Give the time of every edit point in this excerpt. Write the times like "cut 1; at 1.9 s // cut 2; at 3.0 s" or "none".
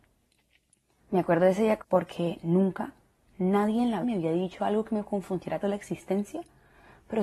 cut 1; at 1.8 s // cut 2; at 4.0 s // cut 3; at 5.6 s